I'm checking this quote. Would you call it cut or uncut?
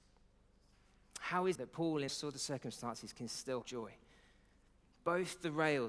cut